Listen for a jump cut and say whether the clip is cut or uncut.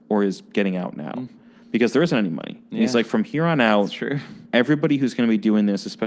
uncut